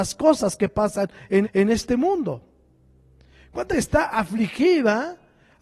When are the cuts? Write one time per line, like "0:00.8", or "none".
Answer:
0:01.4
0:03.7

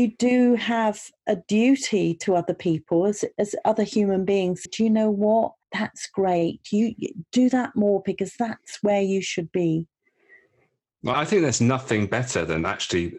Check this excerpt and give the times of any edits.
0:04.7
0:05.6
0:11.1

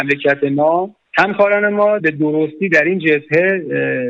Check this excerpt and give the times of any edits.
0:01.0
0:02.0

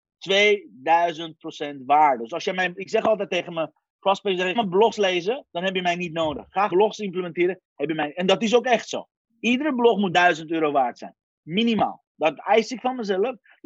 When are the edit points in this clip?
0:04.6
0:06.7
0:10.1

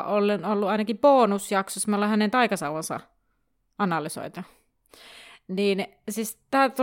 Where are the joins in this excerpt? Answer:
none

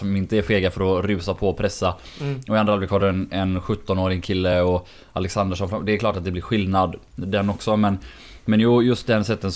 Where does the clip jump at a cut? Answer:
none

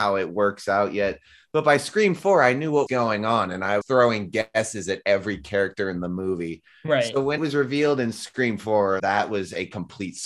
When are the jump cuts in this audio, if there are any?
0:02.9
0:03.8
0:07.4
0:09.0

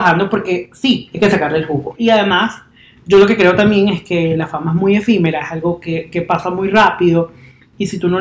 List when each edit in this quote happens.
none

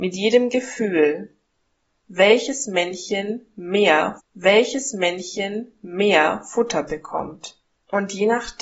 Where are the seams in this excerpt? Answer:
0:04.2

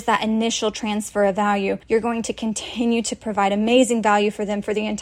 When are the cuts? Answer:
0:01.8

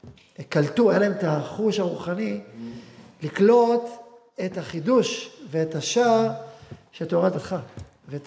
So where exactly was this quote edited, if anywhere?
0:07.3

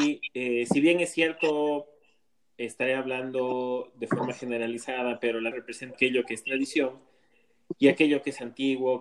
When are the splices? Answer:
0:05.5
0:05.9

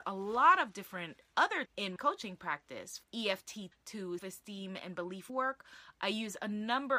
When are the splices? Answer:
0:01.7
0:02.0
0:03.0
0:03.7
0:04.2
0:05.3

